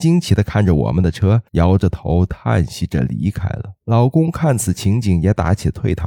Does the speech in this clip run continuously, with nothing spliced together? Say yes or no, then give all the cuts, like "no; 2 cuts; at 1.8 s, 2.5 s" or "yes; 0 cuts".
no; 2 cuts; at 1.5 s, 3.8 s